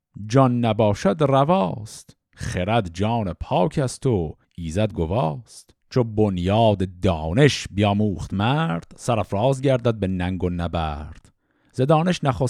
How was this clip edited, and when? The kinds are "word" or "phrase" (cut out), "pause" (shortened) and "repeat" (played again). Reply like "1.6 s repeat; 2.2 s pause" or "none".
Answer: 4.4 s pause; 5.8 s pause